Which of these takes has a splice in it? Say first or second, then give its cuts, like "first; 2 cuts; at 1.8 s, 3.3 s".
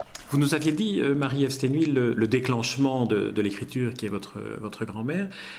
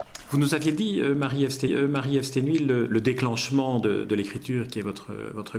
second; 1 cut; at 1.7 s